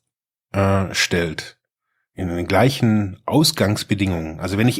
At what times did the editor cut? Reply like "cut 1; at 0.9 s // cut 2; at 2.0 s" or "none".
none